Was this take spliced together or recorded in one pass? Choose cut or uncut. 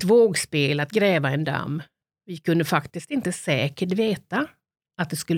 uncut